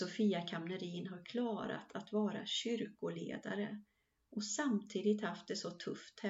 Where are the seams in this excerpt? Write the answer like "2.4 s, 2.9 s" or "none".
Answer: none